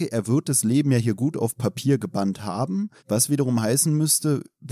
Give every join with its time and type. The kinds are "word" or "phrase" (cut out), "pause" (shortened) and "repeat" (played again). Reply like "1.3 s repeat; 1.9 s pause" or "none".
3.0 s pause